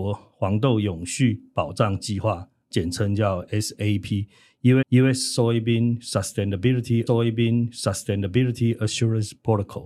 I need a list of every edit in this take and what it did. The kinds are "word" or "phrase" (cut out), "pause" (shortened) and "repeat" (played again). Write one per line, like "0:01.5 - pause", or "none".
0:03.5 - word
0:04.8 - repeat
0:07.1 - repeat